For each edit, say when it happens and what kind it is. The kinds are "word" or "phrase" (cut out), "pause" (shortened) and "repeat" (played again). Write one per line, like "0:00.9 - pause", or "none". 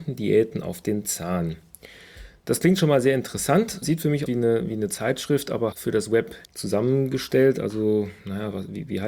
0:03.8 - word
0:04.3 - phrase
0:05.7 - word
0:06.4 - pause